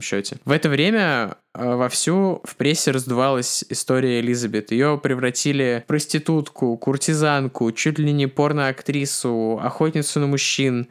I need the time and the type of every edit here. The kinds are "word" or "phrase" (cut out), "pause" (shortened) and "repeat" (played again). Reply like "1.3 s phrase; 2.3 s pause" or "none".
none